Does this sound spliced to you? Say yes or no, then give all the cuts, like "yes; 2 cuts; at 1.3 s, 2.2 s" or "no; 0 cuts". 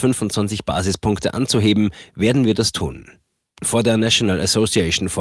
no; 0 cuts